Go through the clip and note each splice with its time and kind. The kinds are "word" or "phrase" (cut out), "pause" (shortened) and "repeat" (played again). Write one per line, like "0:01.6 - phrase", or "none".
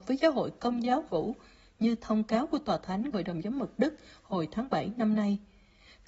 0:01.1 - word
0:03.1 - word